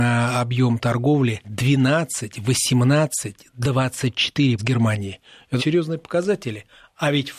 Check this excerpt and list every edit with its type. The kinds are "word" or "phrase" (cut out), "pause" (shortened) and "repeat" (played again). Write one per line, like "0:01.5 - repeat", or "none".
0:01.4 - word
0:04.6 - word
0:05.6 - word